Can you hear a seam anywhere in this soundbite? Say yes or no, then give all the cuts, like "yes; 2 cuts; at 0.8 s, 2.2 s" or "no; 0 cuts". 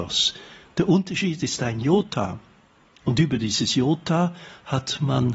no; 0 cuts